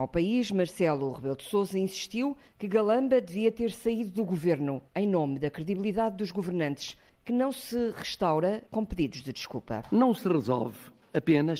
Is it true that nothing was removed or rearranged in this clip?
yes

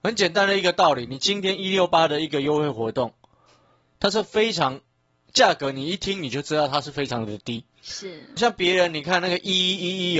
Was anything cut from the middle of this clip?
yes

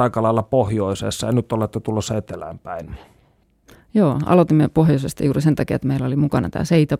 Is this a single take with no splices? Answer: yes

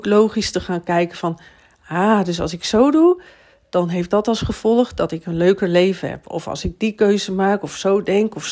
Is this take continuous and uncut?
yes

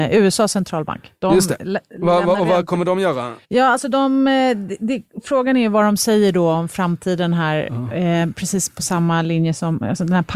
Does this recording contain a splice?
yes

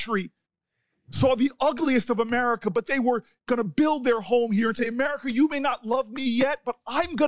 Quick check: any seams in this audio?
no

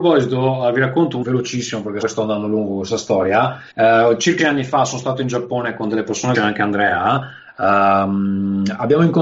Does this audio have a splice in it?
yes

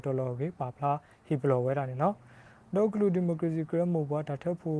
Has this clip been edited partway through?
no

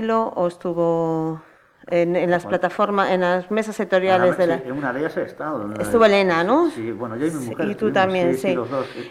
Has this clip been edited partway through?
no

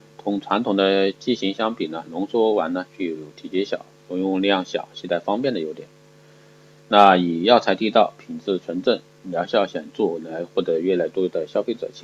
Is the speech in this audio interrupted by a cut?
no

